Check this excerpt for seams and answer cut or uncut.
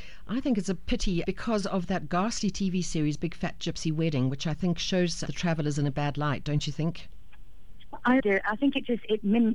cut